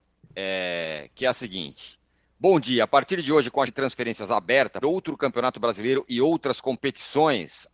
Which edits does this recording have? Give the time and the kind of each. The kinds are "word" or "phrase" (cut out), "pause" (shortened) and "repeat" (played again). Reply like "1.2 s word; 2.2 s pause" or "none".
3.7 s word; 4.8 s phrase